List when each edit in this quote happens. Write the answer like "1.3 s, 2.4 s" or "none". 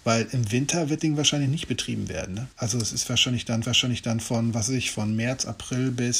1.0 s, 2.5 s, 3.6 s